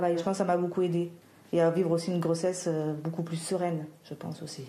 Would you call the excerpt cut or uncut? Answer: uncut